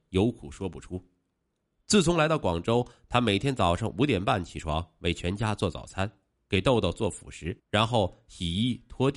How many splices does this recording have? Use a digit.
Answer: 1